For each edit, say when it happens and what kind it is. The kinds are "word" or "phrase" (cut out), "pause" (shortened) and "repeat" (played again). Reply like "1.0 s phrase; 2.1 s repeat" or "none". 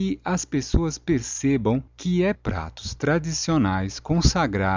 1.9 s pause; 2.3 s phrase